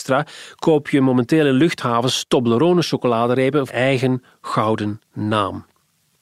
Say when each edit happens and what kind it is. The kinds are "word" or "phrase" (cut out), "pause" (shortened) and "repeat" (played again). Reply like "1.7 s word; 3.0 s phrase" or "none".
3.7 s phrase